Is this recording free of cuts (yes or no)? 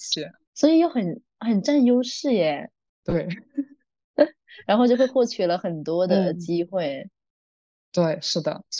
yes